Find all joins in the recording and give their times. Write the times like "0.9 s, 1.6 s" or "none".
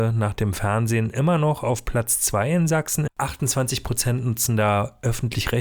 3.1 s